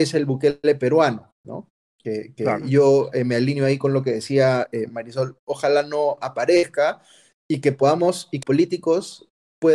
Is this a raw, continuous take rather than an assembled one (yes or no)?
no